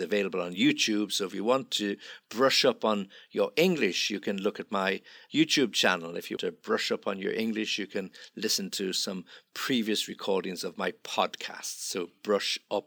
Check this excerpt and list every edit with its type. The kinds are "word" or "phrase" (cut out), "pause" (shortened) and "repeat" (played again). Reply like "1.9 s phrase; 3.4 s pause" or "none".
6.4 s word